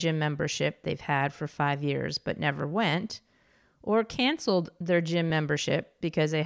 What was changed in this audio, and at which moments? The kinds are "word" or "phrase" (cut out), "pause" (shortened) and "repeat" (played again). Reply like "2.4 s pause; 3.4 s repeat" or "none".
none